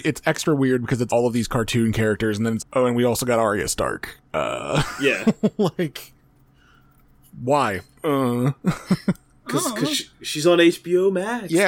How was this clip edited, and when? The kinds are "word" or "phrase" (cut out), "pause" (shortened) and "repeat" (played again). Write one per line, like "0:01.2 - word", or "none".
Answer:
0:01.1 - word
0:02.6 - word